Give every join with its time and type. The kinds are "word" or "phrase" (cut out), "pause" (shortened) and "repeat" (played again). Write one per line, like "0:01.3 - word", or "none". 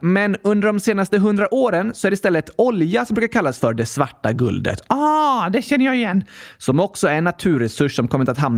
none